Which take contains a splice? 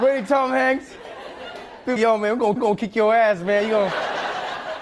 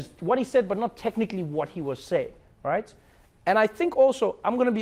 first; 2 cuts; at 2.0 s, 2.6 s

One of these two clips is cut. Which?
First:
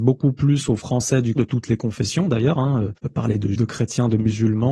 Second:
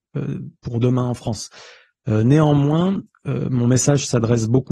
first; 3 cuts; at 1.4 s, 3.0 s, 3.5 s

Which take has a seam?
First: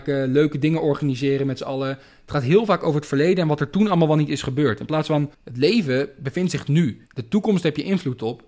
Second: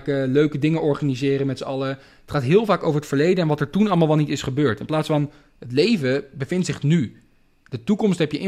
first; 2 cuts; at 5.3 s, 7.1 s

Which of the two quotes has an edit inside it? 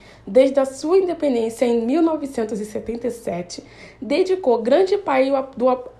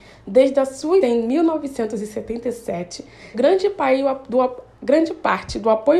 second; 2 cuts; at 1.0 s, 3.3 s

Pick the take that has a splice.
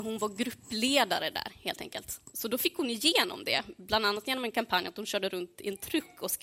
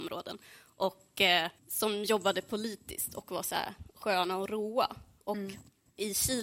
second; 1 cut; at 1.6 s

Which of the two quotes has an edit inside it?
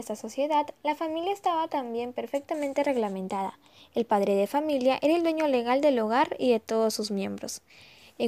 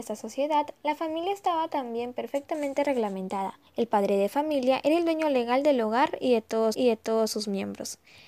second; 2 cuts; at 3.7 s, 6.7 s

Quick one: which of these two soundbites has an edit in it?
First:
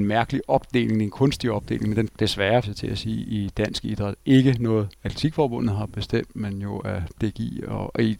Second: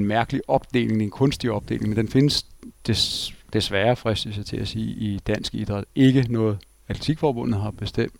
first; 3 cuts; at 2.1 s, 2.6 s, 4.9 s

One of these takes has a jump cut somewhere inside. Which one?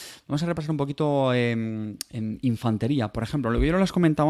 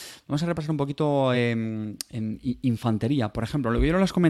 first; 1 cut; at 2.4 s

